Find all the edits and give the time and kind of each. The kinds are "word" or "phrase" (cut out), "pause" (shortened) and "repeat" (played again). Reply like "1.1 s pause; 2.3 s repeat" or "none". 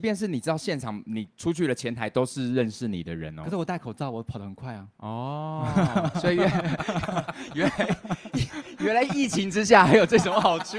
1.3 s pause